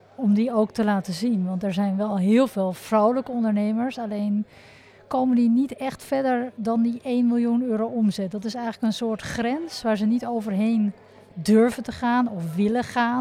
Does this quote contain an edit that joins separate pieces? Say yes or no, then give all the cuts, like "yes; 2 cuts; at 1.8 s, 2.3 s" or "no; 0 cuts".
no; 0 cuts